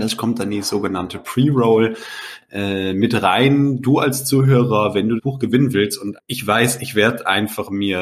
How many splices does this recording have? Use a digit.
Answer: 2